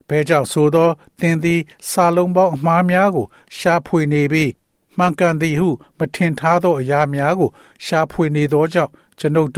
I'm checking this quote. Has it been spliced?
no; 0 cuts

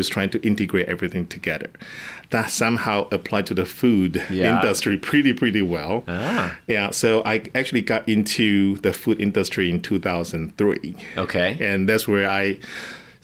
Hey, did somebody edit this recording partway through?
no; 0 cuts

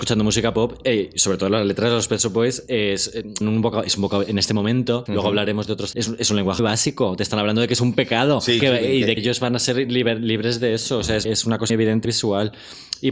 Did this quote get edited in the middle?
yes; 9 cuts; at 3.4 s, 5.1 s, 5.9 s, 6.6 s, 8.6 s, 9.2 s, 11.2 s, 11.7 s, 12.0 s

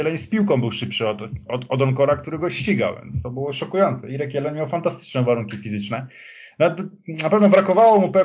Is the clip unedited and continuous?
yes; 0 cuts

